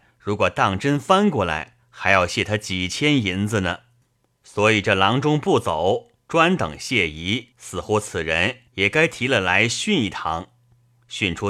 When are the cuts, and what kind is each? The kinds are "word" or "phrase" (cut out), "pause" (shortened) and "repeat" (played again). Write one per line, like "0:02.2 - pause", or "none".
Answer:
0:01.8 - pause
0:07.5 - pause
0:08.7 - pause